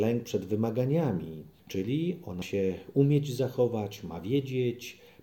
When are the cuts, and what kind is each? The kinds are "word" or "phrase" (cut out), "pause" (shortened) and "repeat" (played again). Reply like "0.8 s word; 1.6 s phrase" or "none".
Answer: 2.4 s word

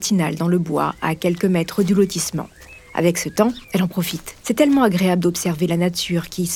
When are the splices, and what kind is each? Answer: 3.6 s pause; 4.4 s pause

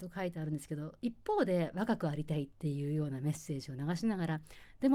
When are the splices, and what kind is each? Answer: 2.5 s pause

